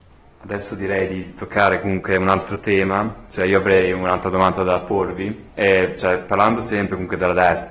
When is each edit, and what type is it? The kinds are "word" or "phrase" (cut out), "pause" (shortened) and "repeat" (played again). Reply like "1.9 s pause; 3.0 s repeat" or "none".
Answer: 5.5 s pause